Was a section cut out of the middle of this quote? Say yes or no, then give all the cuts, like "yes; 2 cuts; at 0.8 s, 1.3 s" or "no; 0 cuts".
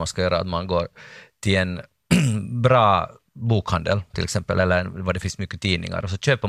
no; 0 cuts